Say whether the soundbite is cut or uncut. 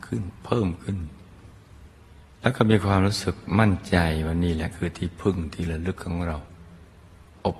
cut